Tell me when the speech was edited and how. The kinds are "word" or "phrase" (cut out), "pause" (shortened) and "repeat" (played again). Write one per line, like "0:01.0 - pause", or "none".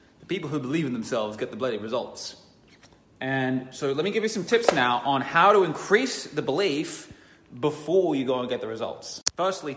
none